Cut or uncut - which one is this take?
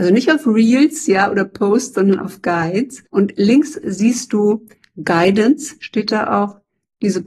cut